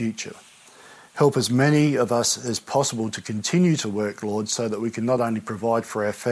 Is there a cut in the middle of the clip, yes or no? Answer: no